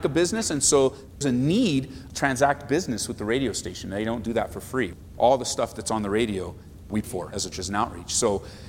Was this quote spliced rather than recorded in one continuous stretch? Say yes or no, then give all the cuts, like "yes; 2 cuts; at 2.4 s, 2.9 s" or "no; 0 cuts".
yes; 4 cuts; at 1.2 s, 2.1 s, 7.0 s, 7.5 s